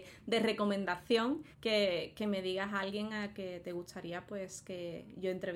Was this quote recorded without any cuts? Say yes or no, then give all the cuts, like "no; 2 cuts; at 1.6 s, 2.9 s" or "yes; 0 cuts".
no; 1 cut; at 1.5 s